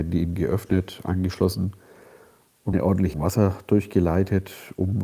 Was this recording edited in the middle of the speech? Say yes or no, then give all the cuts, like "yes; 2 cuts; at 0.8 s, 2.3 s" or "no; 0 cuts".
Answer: yes; 2 cuts; at 2.7 s, 3.1 s